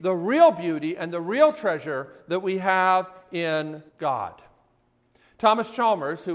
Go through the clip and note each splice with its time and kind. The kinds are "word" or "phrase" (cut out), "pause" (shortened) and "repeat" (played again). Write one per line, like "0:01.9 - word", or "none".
0:03.9 - pause